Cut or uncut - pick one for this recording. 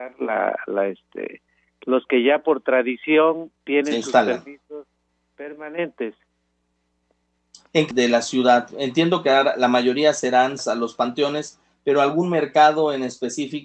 cut